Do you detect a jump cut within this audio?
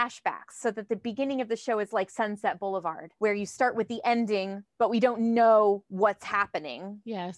yes; 2 cuts; at 3.2 s, 4.7 s

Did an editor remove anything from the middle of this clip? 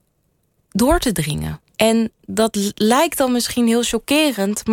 yes; 1 cut; at 1.7 s

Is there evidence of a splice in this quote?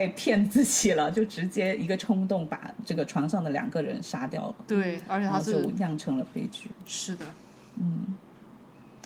no; 0 cuts

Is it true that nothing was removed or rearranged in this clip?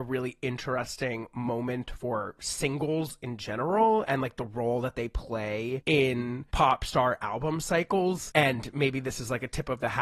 yes; 0 cuts

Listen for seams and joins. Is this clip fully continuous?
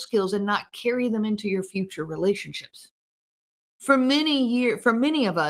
yes; 0 cuts

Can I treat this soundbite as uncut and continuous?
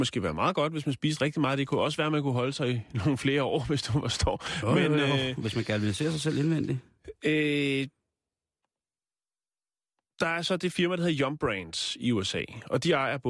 yes; 0 cuts

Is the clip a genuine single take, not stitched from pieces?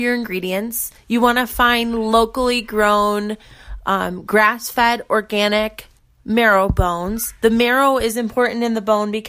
yes; 0 cuts

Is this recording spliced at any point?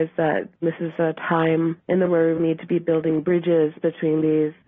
yes; 2 cuts; at 2.1 s, 2.4 s

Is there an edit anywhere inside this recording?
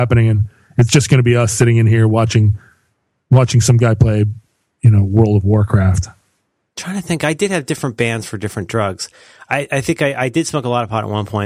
no; 0 cuts

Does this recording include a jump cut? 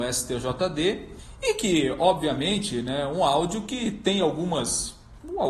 no; 0 cuts

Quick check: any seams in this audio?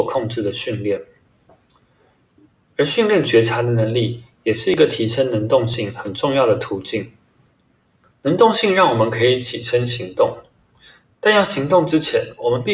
no; 0 cuts

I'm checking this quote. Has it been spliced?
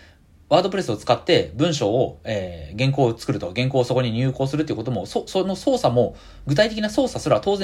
no; 0 cuts

